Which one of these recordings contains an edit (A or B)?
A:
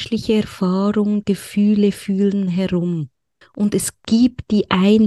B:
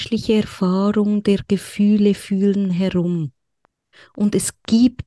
A